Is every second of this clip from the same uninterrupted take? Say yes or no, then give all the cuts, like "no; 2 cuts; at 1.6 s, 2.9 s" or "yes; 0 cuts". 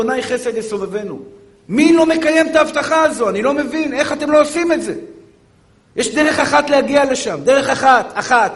yes; 0 cuts